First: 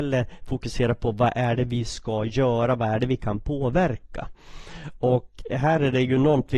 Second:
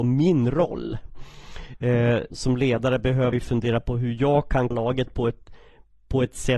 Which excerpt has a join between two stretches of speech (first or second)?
second